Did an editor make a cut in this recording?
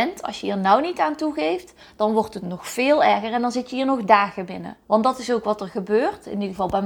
yes; 1 cut; at 4.8 s

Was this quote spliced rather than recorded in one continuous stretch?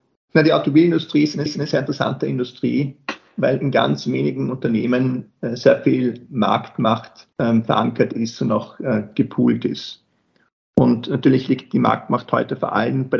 yes; 2 cuts; at 1.5 s, 7.3 s

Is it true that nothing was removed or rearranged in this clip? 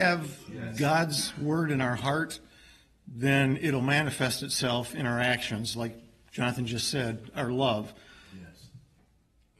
yes; 0 cuts

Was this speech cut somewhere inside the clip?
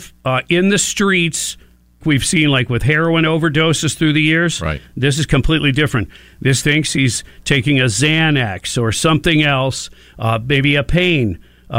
yes; 2 cuts; at 2.0 s, 6.6 s

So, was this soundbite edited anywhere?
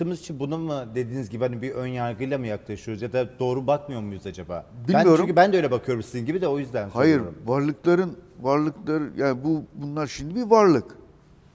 no; 0 cuts

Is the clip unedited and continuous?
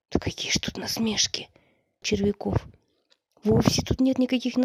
no; 1 cut; at 2.0 s

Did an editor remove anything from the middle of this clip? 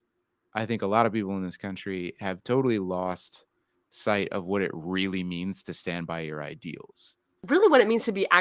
no; 0 cuts

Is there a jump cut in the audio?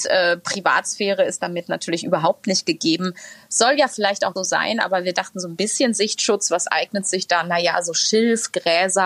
yes; 1 cut; at 4.4 s

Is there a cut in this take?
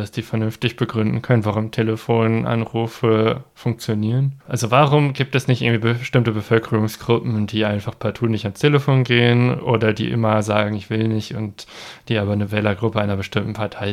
yes; 1 cut; at 4.4 s

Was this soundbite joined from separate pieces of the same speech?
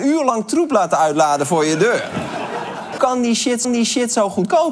yes; 2 cuts; at 3.0 s, 3.6 s

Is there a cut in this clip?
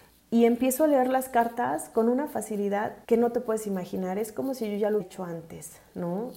yes; 2 cuts; at 3.0 s, 5.0 s

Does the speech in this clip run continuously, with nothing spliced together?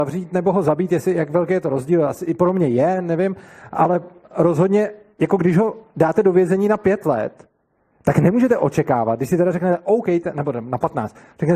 yes; 0 cuts

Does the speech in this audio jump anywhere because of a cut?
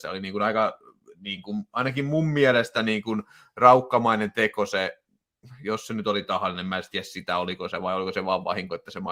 no; 0 cuts

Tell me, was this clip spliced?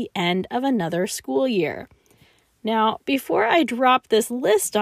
no; 0 cuts

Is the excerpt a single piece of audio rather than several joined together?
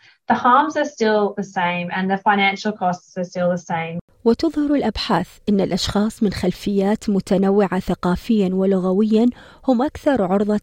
yes; 0 cuts

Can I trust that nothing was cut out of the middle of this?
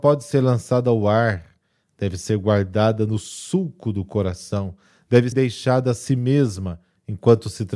no; 1 cut; at 5.3 s

